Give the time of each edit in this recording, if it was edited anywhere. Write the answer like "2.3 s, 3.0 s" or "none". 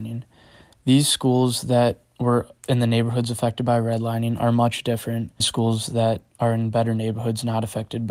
2.6 s, 5.4 s